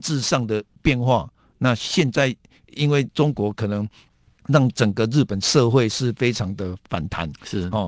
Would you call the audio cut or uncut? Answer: uncut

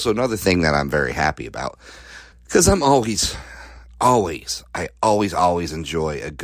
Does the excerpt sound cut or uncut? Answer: cut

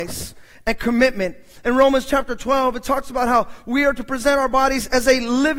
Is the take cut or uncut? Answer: uncut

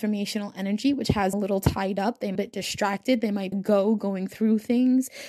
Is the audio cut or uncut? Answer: cut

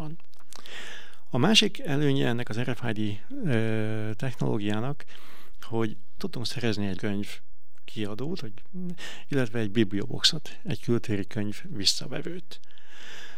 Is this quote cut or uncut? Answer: cut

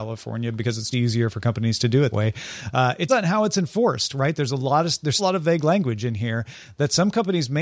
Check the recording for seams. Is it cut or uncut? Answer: cut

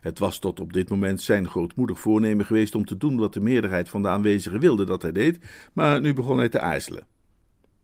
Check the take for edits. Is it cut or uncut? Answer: uncut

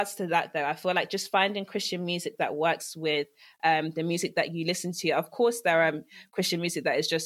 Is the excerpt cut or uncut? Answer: uncut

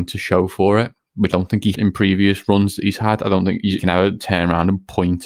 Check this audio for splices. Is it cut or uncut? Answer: cut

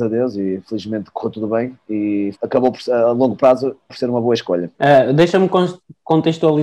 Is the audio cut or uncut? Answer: cut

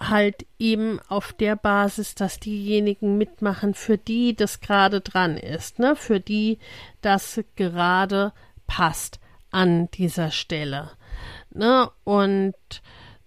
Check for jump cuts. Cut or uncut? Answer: uncut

